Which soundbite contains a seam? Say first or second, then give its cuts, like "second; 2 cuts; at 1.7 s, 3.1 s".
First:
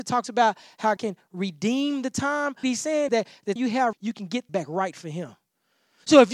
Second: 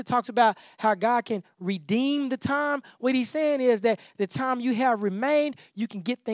first; 6 cuts; at 1.0 s, 2.6 s, 3.1 s, 3.6 s, 3.9 s, 4.5 s